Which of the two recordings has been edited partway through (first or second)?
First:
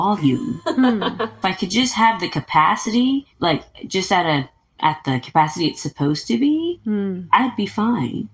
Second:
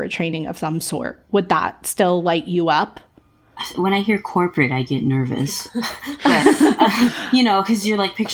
first